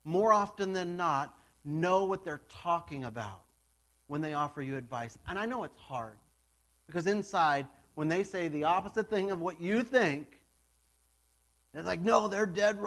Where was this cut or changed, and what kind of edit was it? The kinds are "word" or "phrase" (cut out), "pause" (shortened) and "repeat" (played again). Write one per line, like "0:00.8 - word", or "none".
none